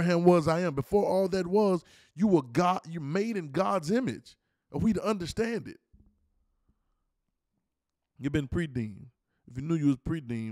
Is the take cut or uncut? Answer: uncut